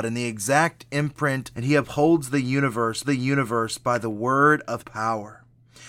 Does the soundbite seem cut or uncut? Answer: cut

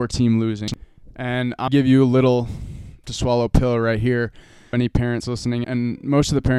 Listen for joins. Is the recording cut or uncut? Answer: cut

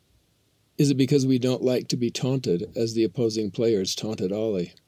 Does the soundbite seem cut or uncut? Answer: uncut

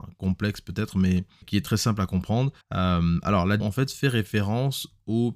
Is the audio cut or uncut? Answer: cut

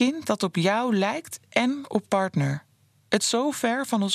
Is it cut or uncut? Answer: cut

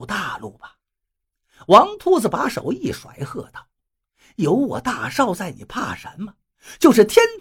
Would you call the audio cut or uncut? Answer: uncut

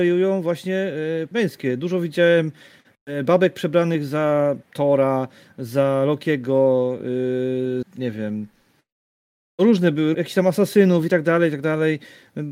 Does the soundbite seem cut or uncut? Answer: cut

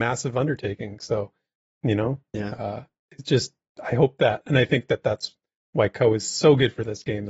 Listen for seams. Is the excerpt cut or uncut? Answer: uncut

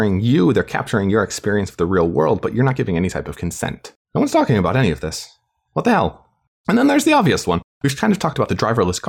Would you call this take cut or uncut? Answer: uncut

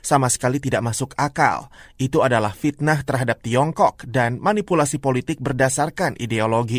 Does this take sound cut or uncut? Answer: uncut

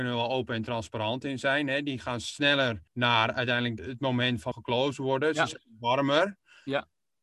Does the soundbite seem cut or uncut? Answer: cut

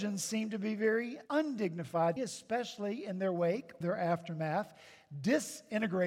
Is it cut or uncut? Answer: cut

